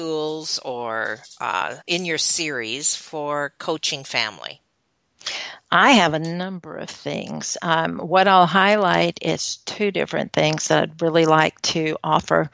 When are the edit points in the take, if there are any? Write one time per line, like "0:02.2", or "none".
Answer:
0:01.8